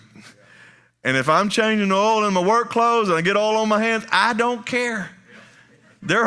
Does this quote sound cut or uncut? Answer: uncut